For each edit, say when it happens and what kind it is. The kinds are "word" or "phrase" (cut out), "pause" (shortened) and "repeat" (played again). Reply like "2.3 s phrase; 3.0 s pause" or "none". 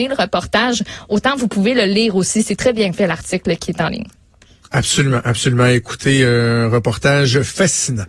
none